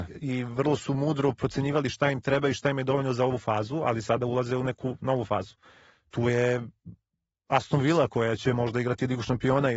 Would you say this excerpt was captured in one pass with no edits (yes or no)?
yes